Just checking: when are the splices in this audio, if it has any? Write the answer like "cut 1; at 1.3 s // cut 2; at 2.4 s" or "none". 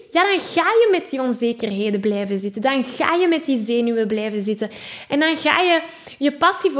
none